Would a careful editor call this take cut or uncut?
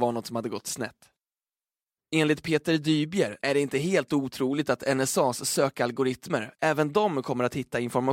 cut